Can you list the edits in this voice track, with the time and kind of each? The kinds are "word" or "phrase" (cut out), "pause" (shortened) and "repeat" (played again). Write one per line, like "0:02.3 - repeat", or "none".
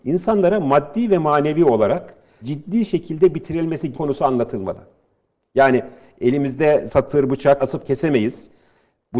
0:02.4 - word
0:03.9 - word
0:06.9 - word
0:07.6 - word